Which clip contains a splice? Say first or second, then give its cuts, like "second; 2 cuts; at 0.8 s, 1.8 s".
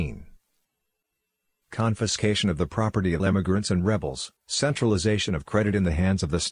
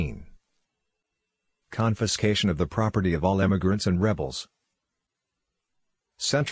first; 2 cuts; at 3.2 s, 4.4 s